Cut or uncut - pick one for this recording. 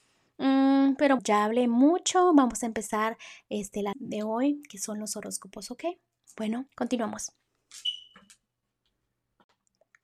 cut